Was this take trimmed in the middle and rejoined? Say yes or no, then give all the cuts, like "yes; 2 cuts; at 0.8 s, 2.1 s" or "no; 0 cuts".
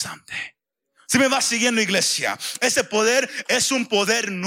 no; 0 cuts